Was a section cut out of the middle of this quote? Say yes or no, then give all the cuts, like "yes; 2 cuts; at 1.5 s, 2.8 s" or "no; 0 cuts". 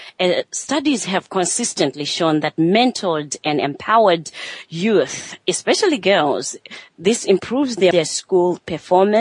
yes; 1 cut; at 7.9 s